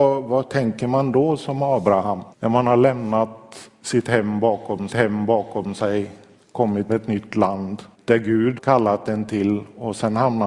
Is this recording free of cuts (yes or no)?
no